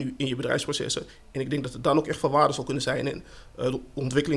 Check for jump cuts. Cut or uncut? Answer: uncut